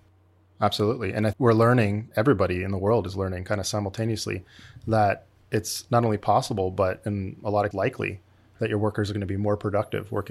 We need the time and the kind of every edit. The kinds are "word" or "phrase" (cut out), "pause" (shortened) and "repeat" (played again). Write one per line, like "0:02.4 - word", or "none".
0:01.3 - word
0:02.1 - word
0:07.7 - word